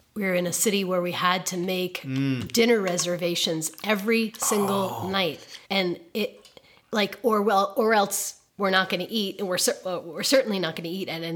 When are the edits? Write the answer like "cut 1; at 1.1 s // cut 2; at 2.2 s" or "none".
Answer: cut 1; at 5.6 s // cut 2; at 8.5 s